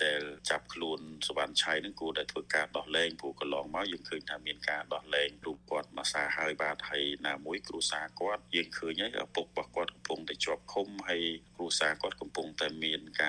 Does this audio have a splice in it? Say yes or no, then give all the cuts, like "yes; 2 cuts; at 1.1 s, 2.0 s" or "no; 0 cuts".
no; 0 cuts